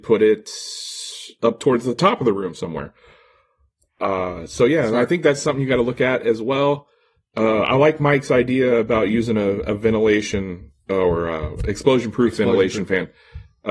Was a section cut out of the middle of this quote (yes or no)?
no